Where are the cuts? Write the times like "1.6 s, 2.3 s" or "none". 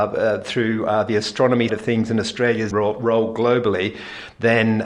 1.7 s, 2.7 s